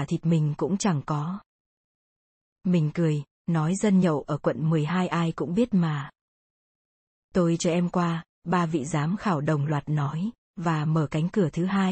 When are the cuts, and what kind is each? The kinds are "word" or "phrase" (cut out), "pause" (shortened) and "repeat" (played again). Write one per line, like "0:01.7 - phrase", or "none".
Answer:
none